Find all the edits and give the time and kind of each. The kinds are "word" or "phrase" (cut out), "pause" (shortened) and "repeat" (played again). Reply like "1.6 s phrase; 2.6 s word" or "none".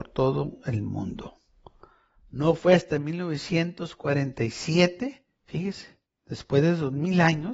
none